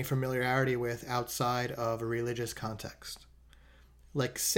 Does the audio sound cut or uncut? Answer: uncut